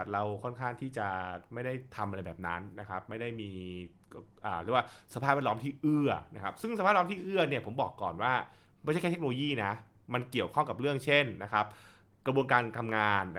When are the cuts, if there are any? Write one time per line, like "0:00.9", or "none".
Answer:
none